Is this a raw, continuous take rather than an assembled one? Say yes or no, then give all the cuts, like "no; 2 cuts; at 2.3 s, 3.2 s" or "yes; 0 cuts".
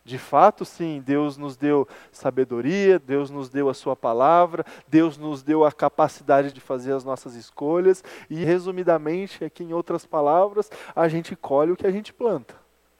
no; 3 cuts; at 3.0 s, 6.5 s, 8.4 s